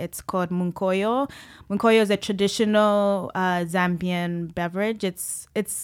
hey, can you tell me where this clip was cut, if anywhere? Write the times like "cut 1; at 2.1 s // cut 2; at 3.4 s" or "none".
none